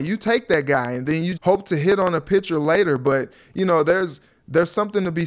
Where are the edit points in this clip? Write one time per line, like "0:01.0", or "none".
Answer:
0:01.4